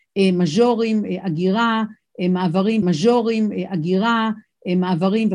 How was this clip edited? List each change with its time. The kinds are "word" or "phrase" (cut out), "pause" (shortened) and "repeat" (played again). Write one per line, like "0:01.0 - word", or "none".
0:02.8 - repeat